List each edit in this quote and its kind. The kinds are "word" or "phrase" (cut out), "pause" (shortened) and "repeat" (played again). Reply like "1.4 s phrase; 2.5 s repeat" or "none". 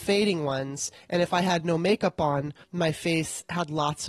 2.6 s pause